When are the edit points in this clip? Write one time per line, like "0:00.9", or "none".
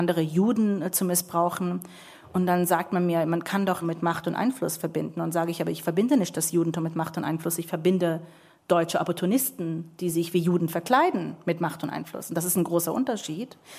0:03.8